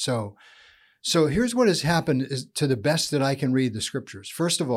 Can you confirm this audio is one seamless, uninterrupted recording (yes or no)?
yes